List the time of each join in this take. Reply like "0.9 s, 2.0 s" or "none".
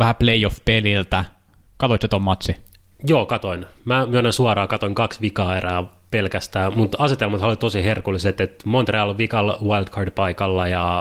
none